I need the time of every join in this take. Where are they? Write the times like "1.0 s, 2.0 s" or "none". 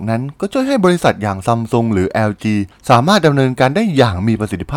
none